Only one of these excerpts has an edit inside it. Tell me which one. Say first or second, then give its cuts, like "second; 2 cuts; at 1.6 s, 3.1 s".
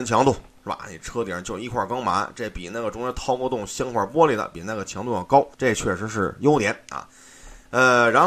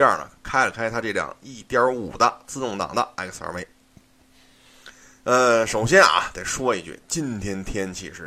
first; 1 cut; at 5.5 s